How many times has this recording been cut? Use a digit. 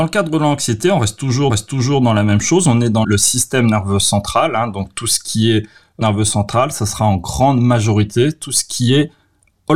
3